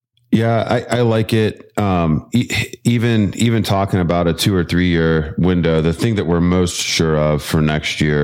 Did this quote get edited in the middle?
no; 0 cuts

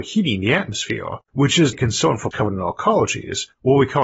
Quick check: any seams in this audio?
yes; 3 cuts; at 1.2 s, 1.7 s, 2.3 s

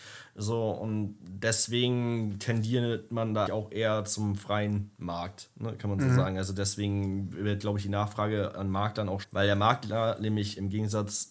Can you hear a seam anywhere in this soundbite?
yes; 2 cuts; at 3.5 s, 9.2 s

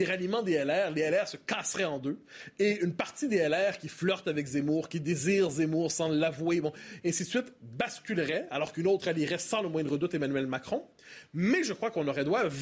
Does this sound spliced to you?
no; 0 cuts

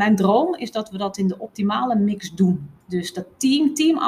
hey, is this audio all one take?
no; 1 cut; at 2.8 s

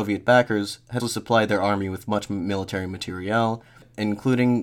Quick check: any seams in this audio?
yes; 1 cut; at 1.0 s

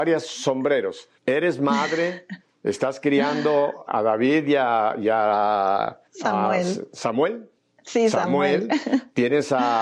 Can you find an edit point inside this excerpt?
yes; 4 cuts; at 1.2 s, 3.9 s, 6.1 s, 7.6 s

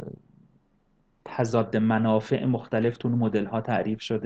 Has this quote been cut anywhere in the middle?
no; 0 cuts

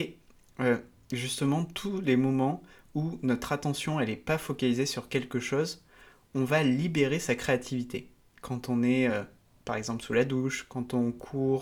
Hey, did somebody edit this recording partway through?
no; 0 cuts

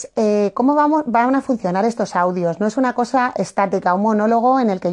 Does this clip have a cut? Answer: no; 0 cuts

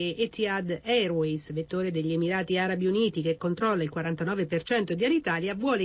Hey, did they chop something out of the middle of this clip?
no; 0 cuts

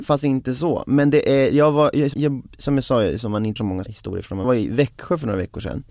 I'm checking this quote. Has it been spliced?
yes; 4 cuts; at 2.1 s, 3.6 s, 3.9 s, 4.4 s

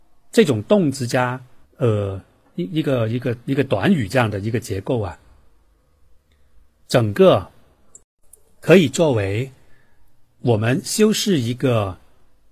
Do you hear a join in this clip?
yes; 1 cut; at 1.6 s

